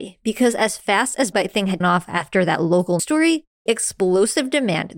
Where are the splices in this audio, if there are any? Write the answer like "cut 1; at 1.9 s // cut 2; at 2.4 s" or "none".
cut 1; at 1.3 s // cut 2; at 1.8 s // cut 3; at 3.0 s // cut 4; at 3.7 s